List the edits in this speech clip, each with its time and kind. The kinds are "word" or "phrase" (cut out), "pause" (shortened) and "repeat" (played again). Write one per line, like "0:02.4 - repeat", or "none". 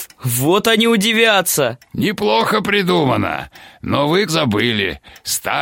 0:04.3 - word